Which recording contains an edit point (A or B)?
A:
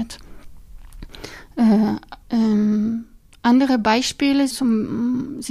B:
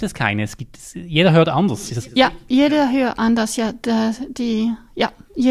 A